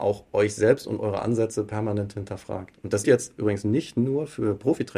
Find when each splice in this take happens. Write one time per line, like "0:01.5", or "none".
0:03.0